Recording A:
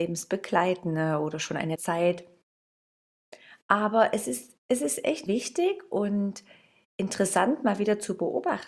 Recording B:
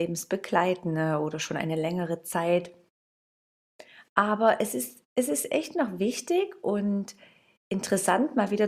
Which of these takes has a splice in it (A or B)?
A